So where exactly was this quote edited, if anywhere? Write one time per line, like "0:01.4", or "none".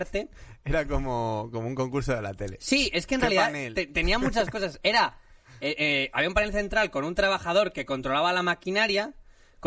none